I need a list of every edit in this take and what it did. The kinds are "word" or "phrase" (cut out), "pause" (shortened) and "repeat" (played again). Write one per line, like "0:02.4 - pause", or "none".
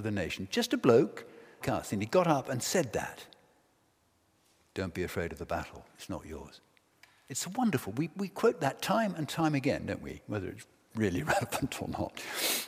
0:01.6 - word